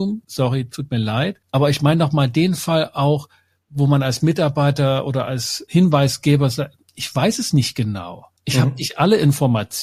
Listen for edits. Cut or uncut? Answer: cut